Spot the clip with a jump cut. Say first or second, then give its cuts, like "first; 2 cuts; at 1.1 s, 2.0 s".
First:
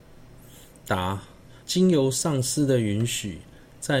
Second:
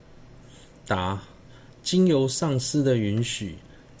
first; 1 cut; at 1.6 s